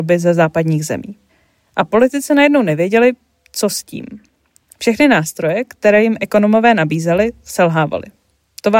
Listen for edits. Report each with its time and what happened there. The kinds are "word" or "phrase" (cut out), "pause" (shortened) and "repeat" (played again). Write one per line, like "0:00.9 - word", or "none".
0:01.3 - pause